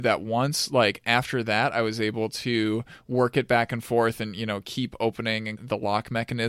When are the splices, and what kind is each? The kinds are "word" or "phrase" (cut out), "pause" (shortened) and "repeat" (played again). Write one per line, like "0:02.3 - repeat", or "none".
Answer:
0:05.6 - word